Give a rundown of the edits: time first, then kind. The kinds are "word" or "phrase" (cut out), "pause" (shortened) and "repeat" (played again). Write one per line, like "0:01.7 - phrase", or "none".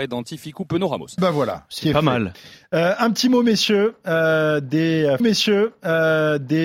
0:01.2 - word
0:05.2 - repeat